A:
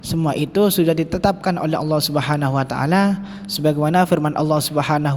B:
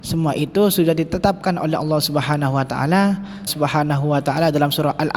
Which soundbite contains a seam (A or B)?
B